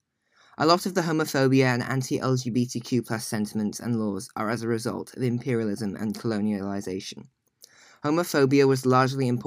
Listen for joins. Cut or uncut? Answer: uncut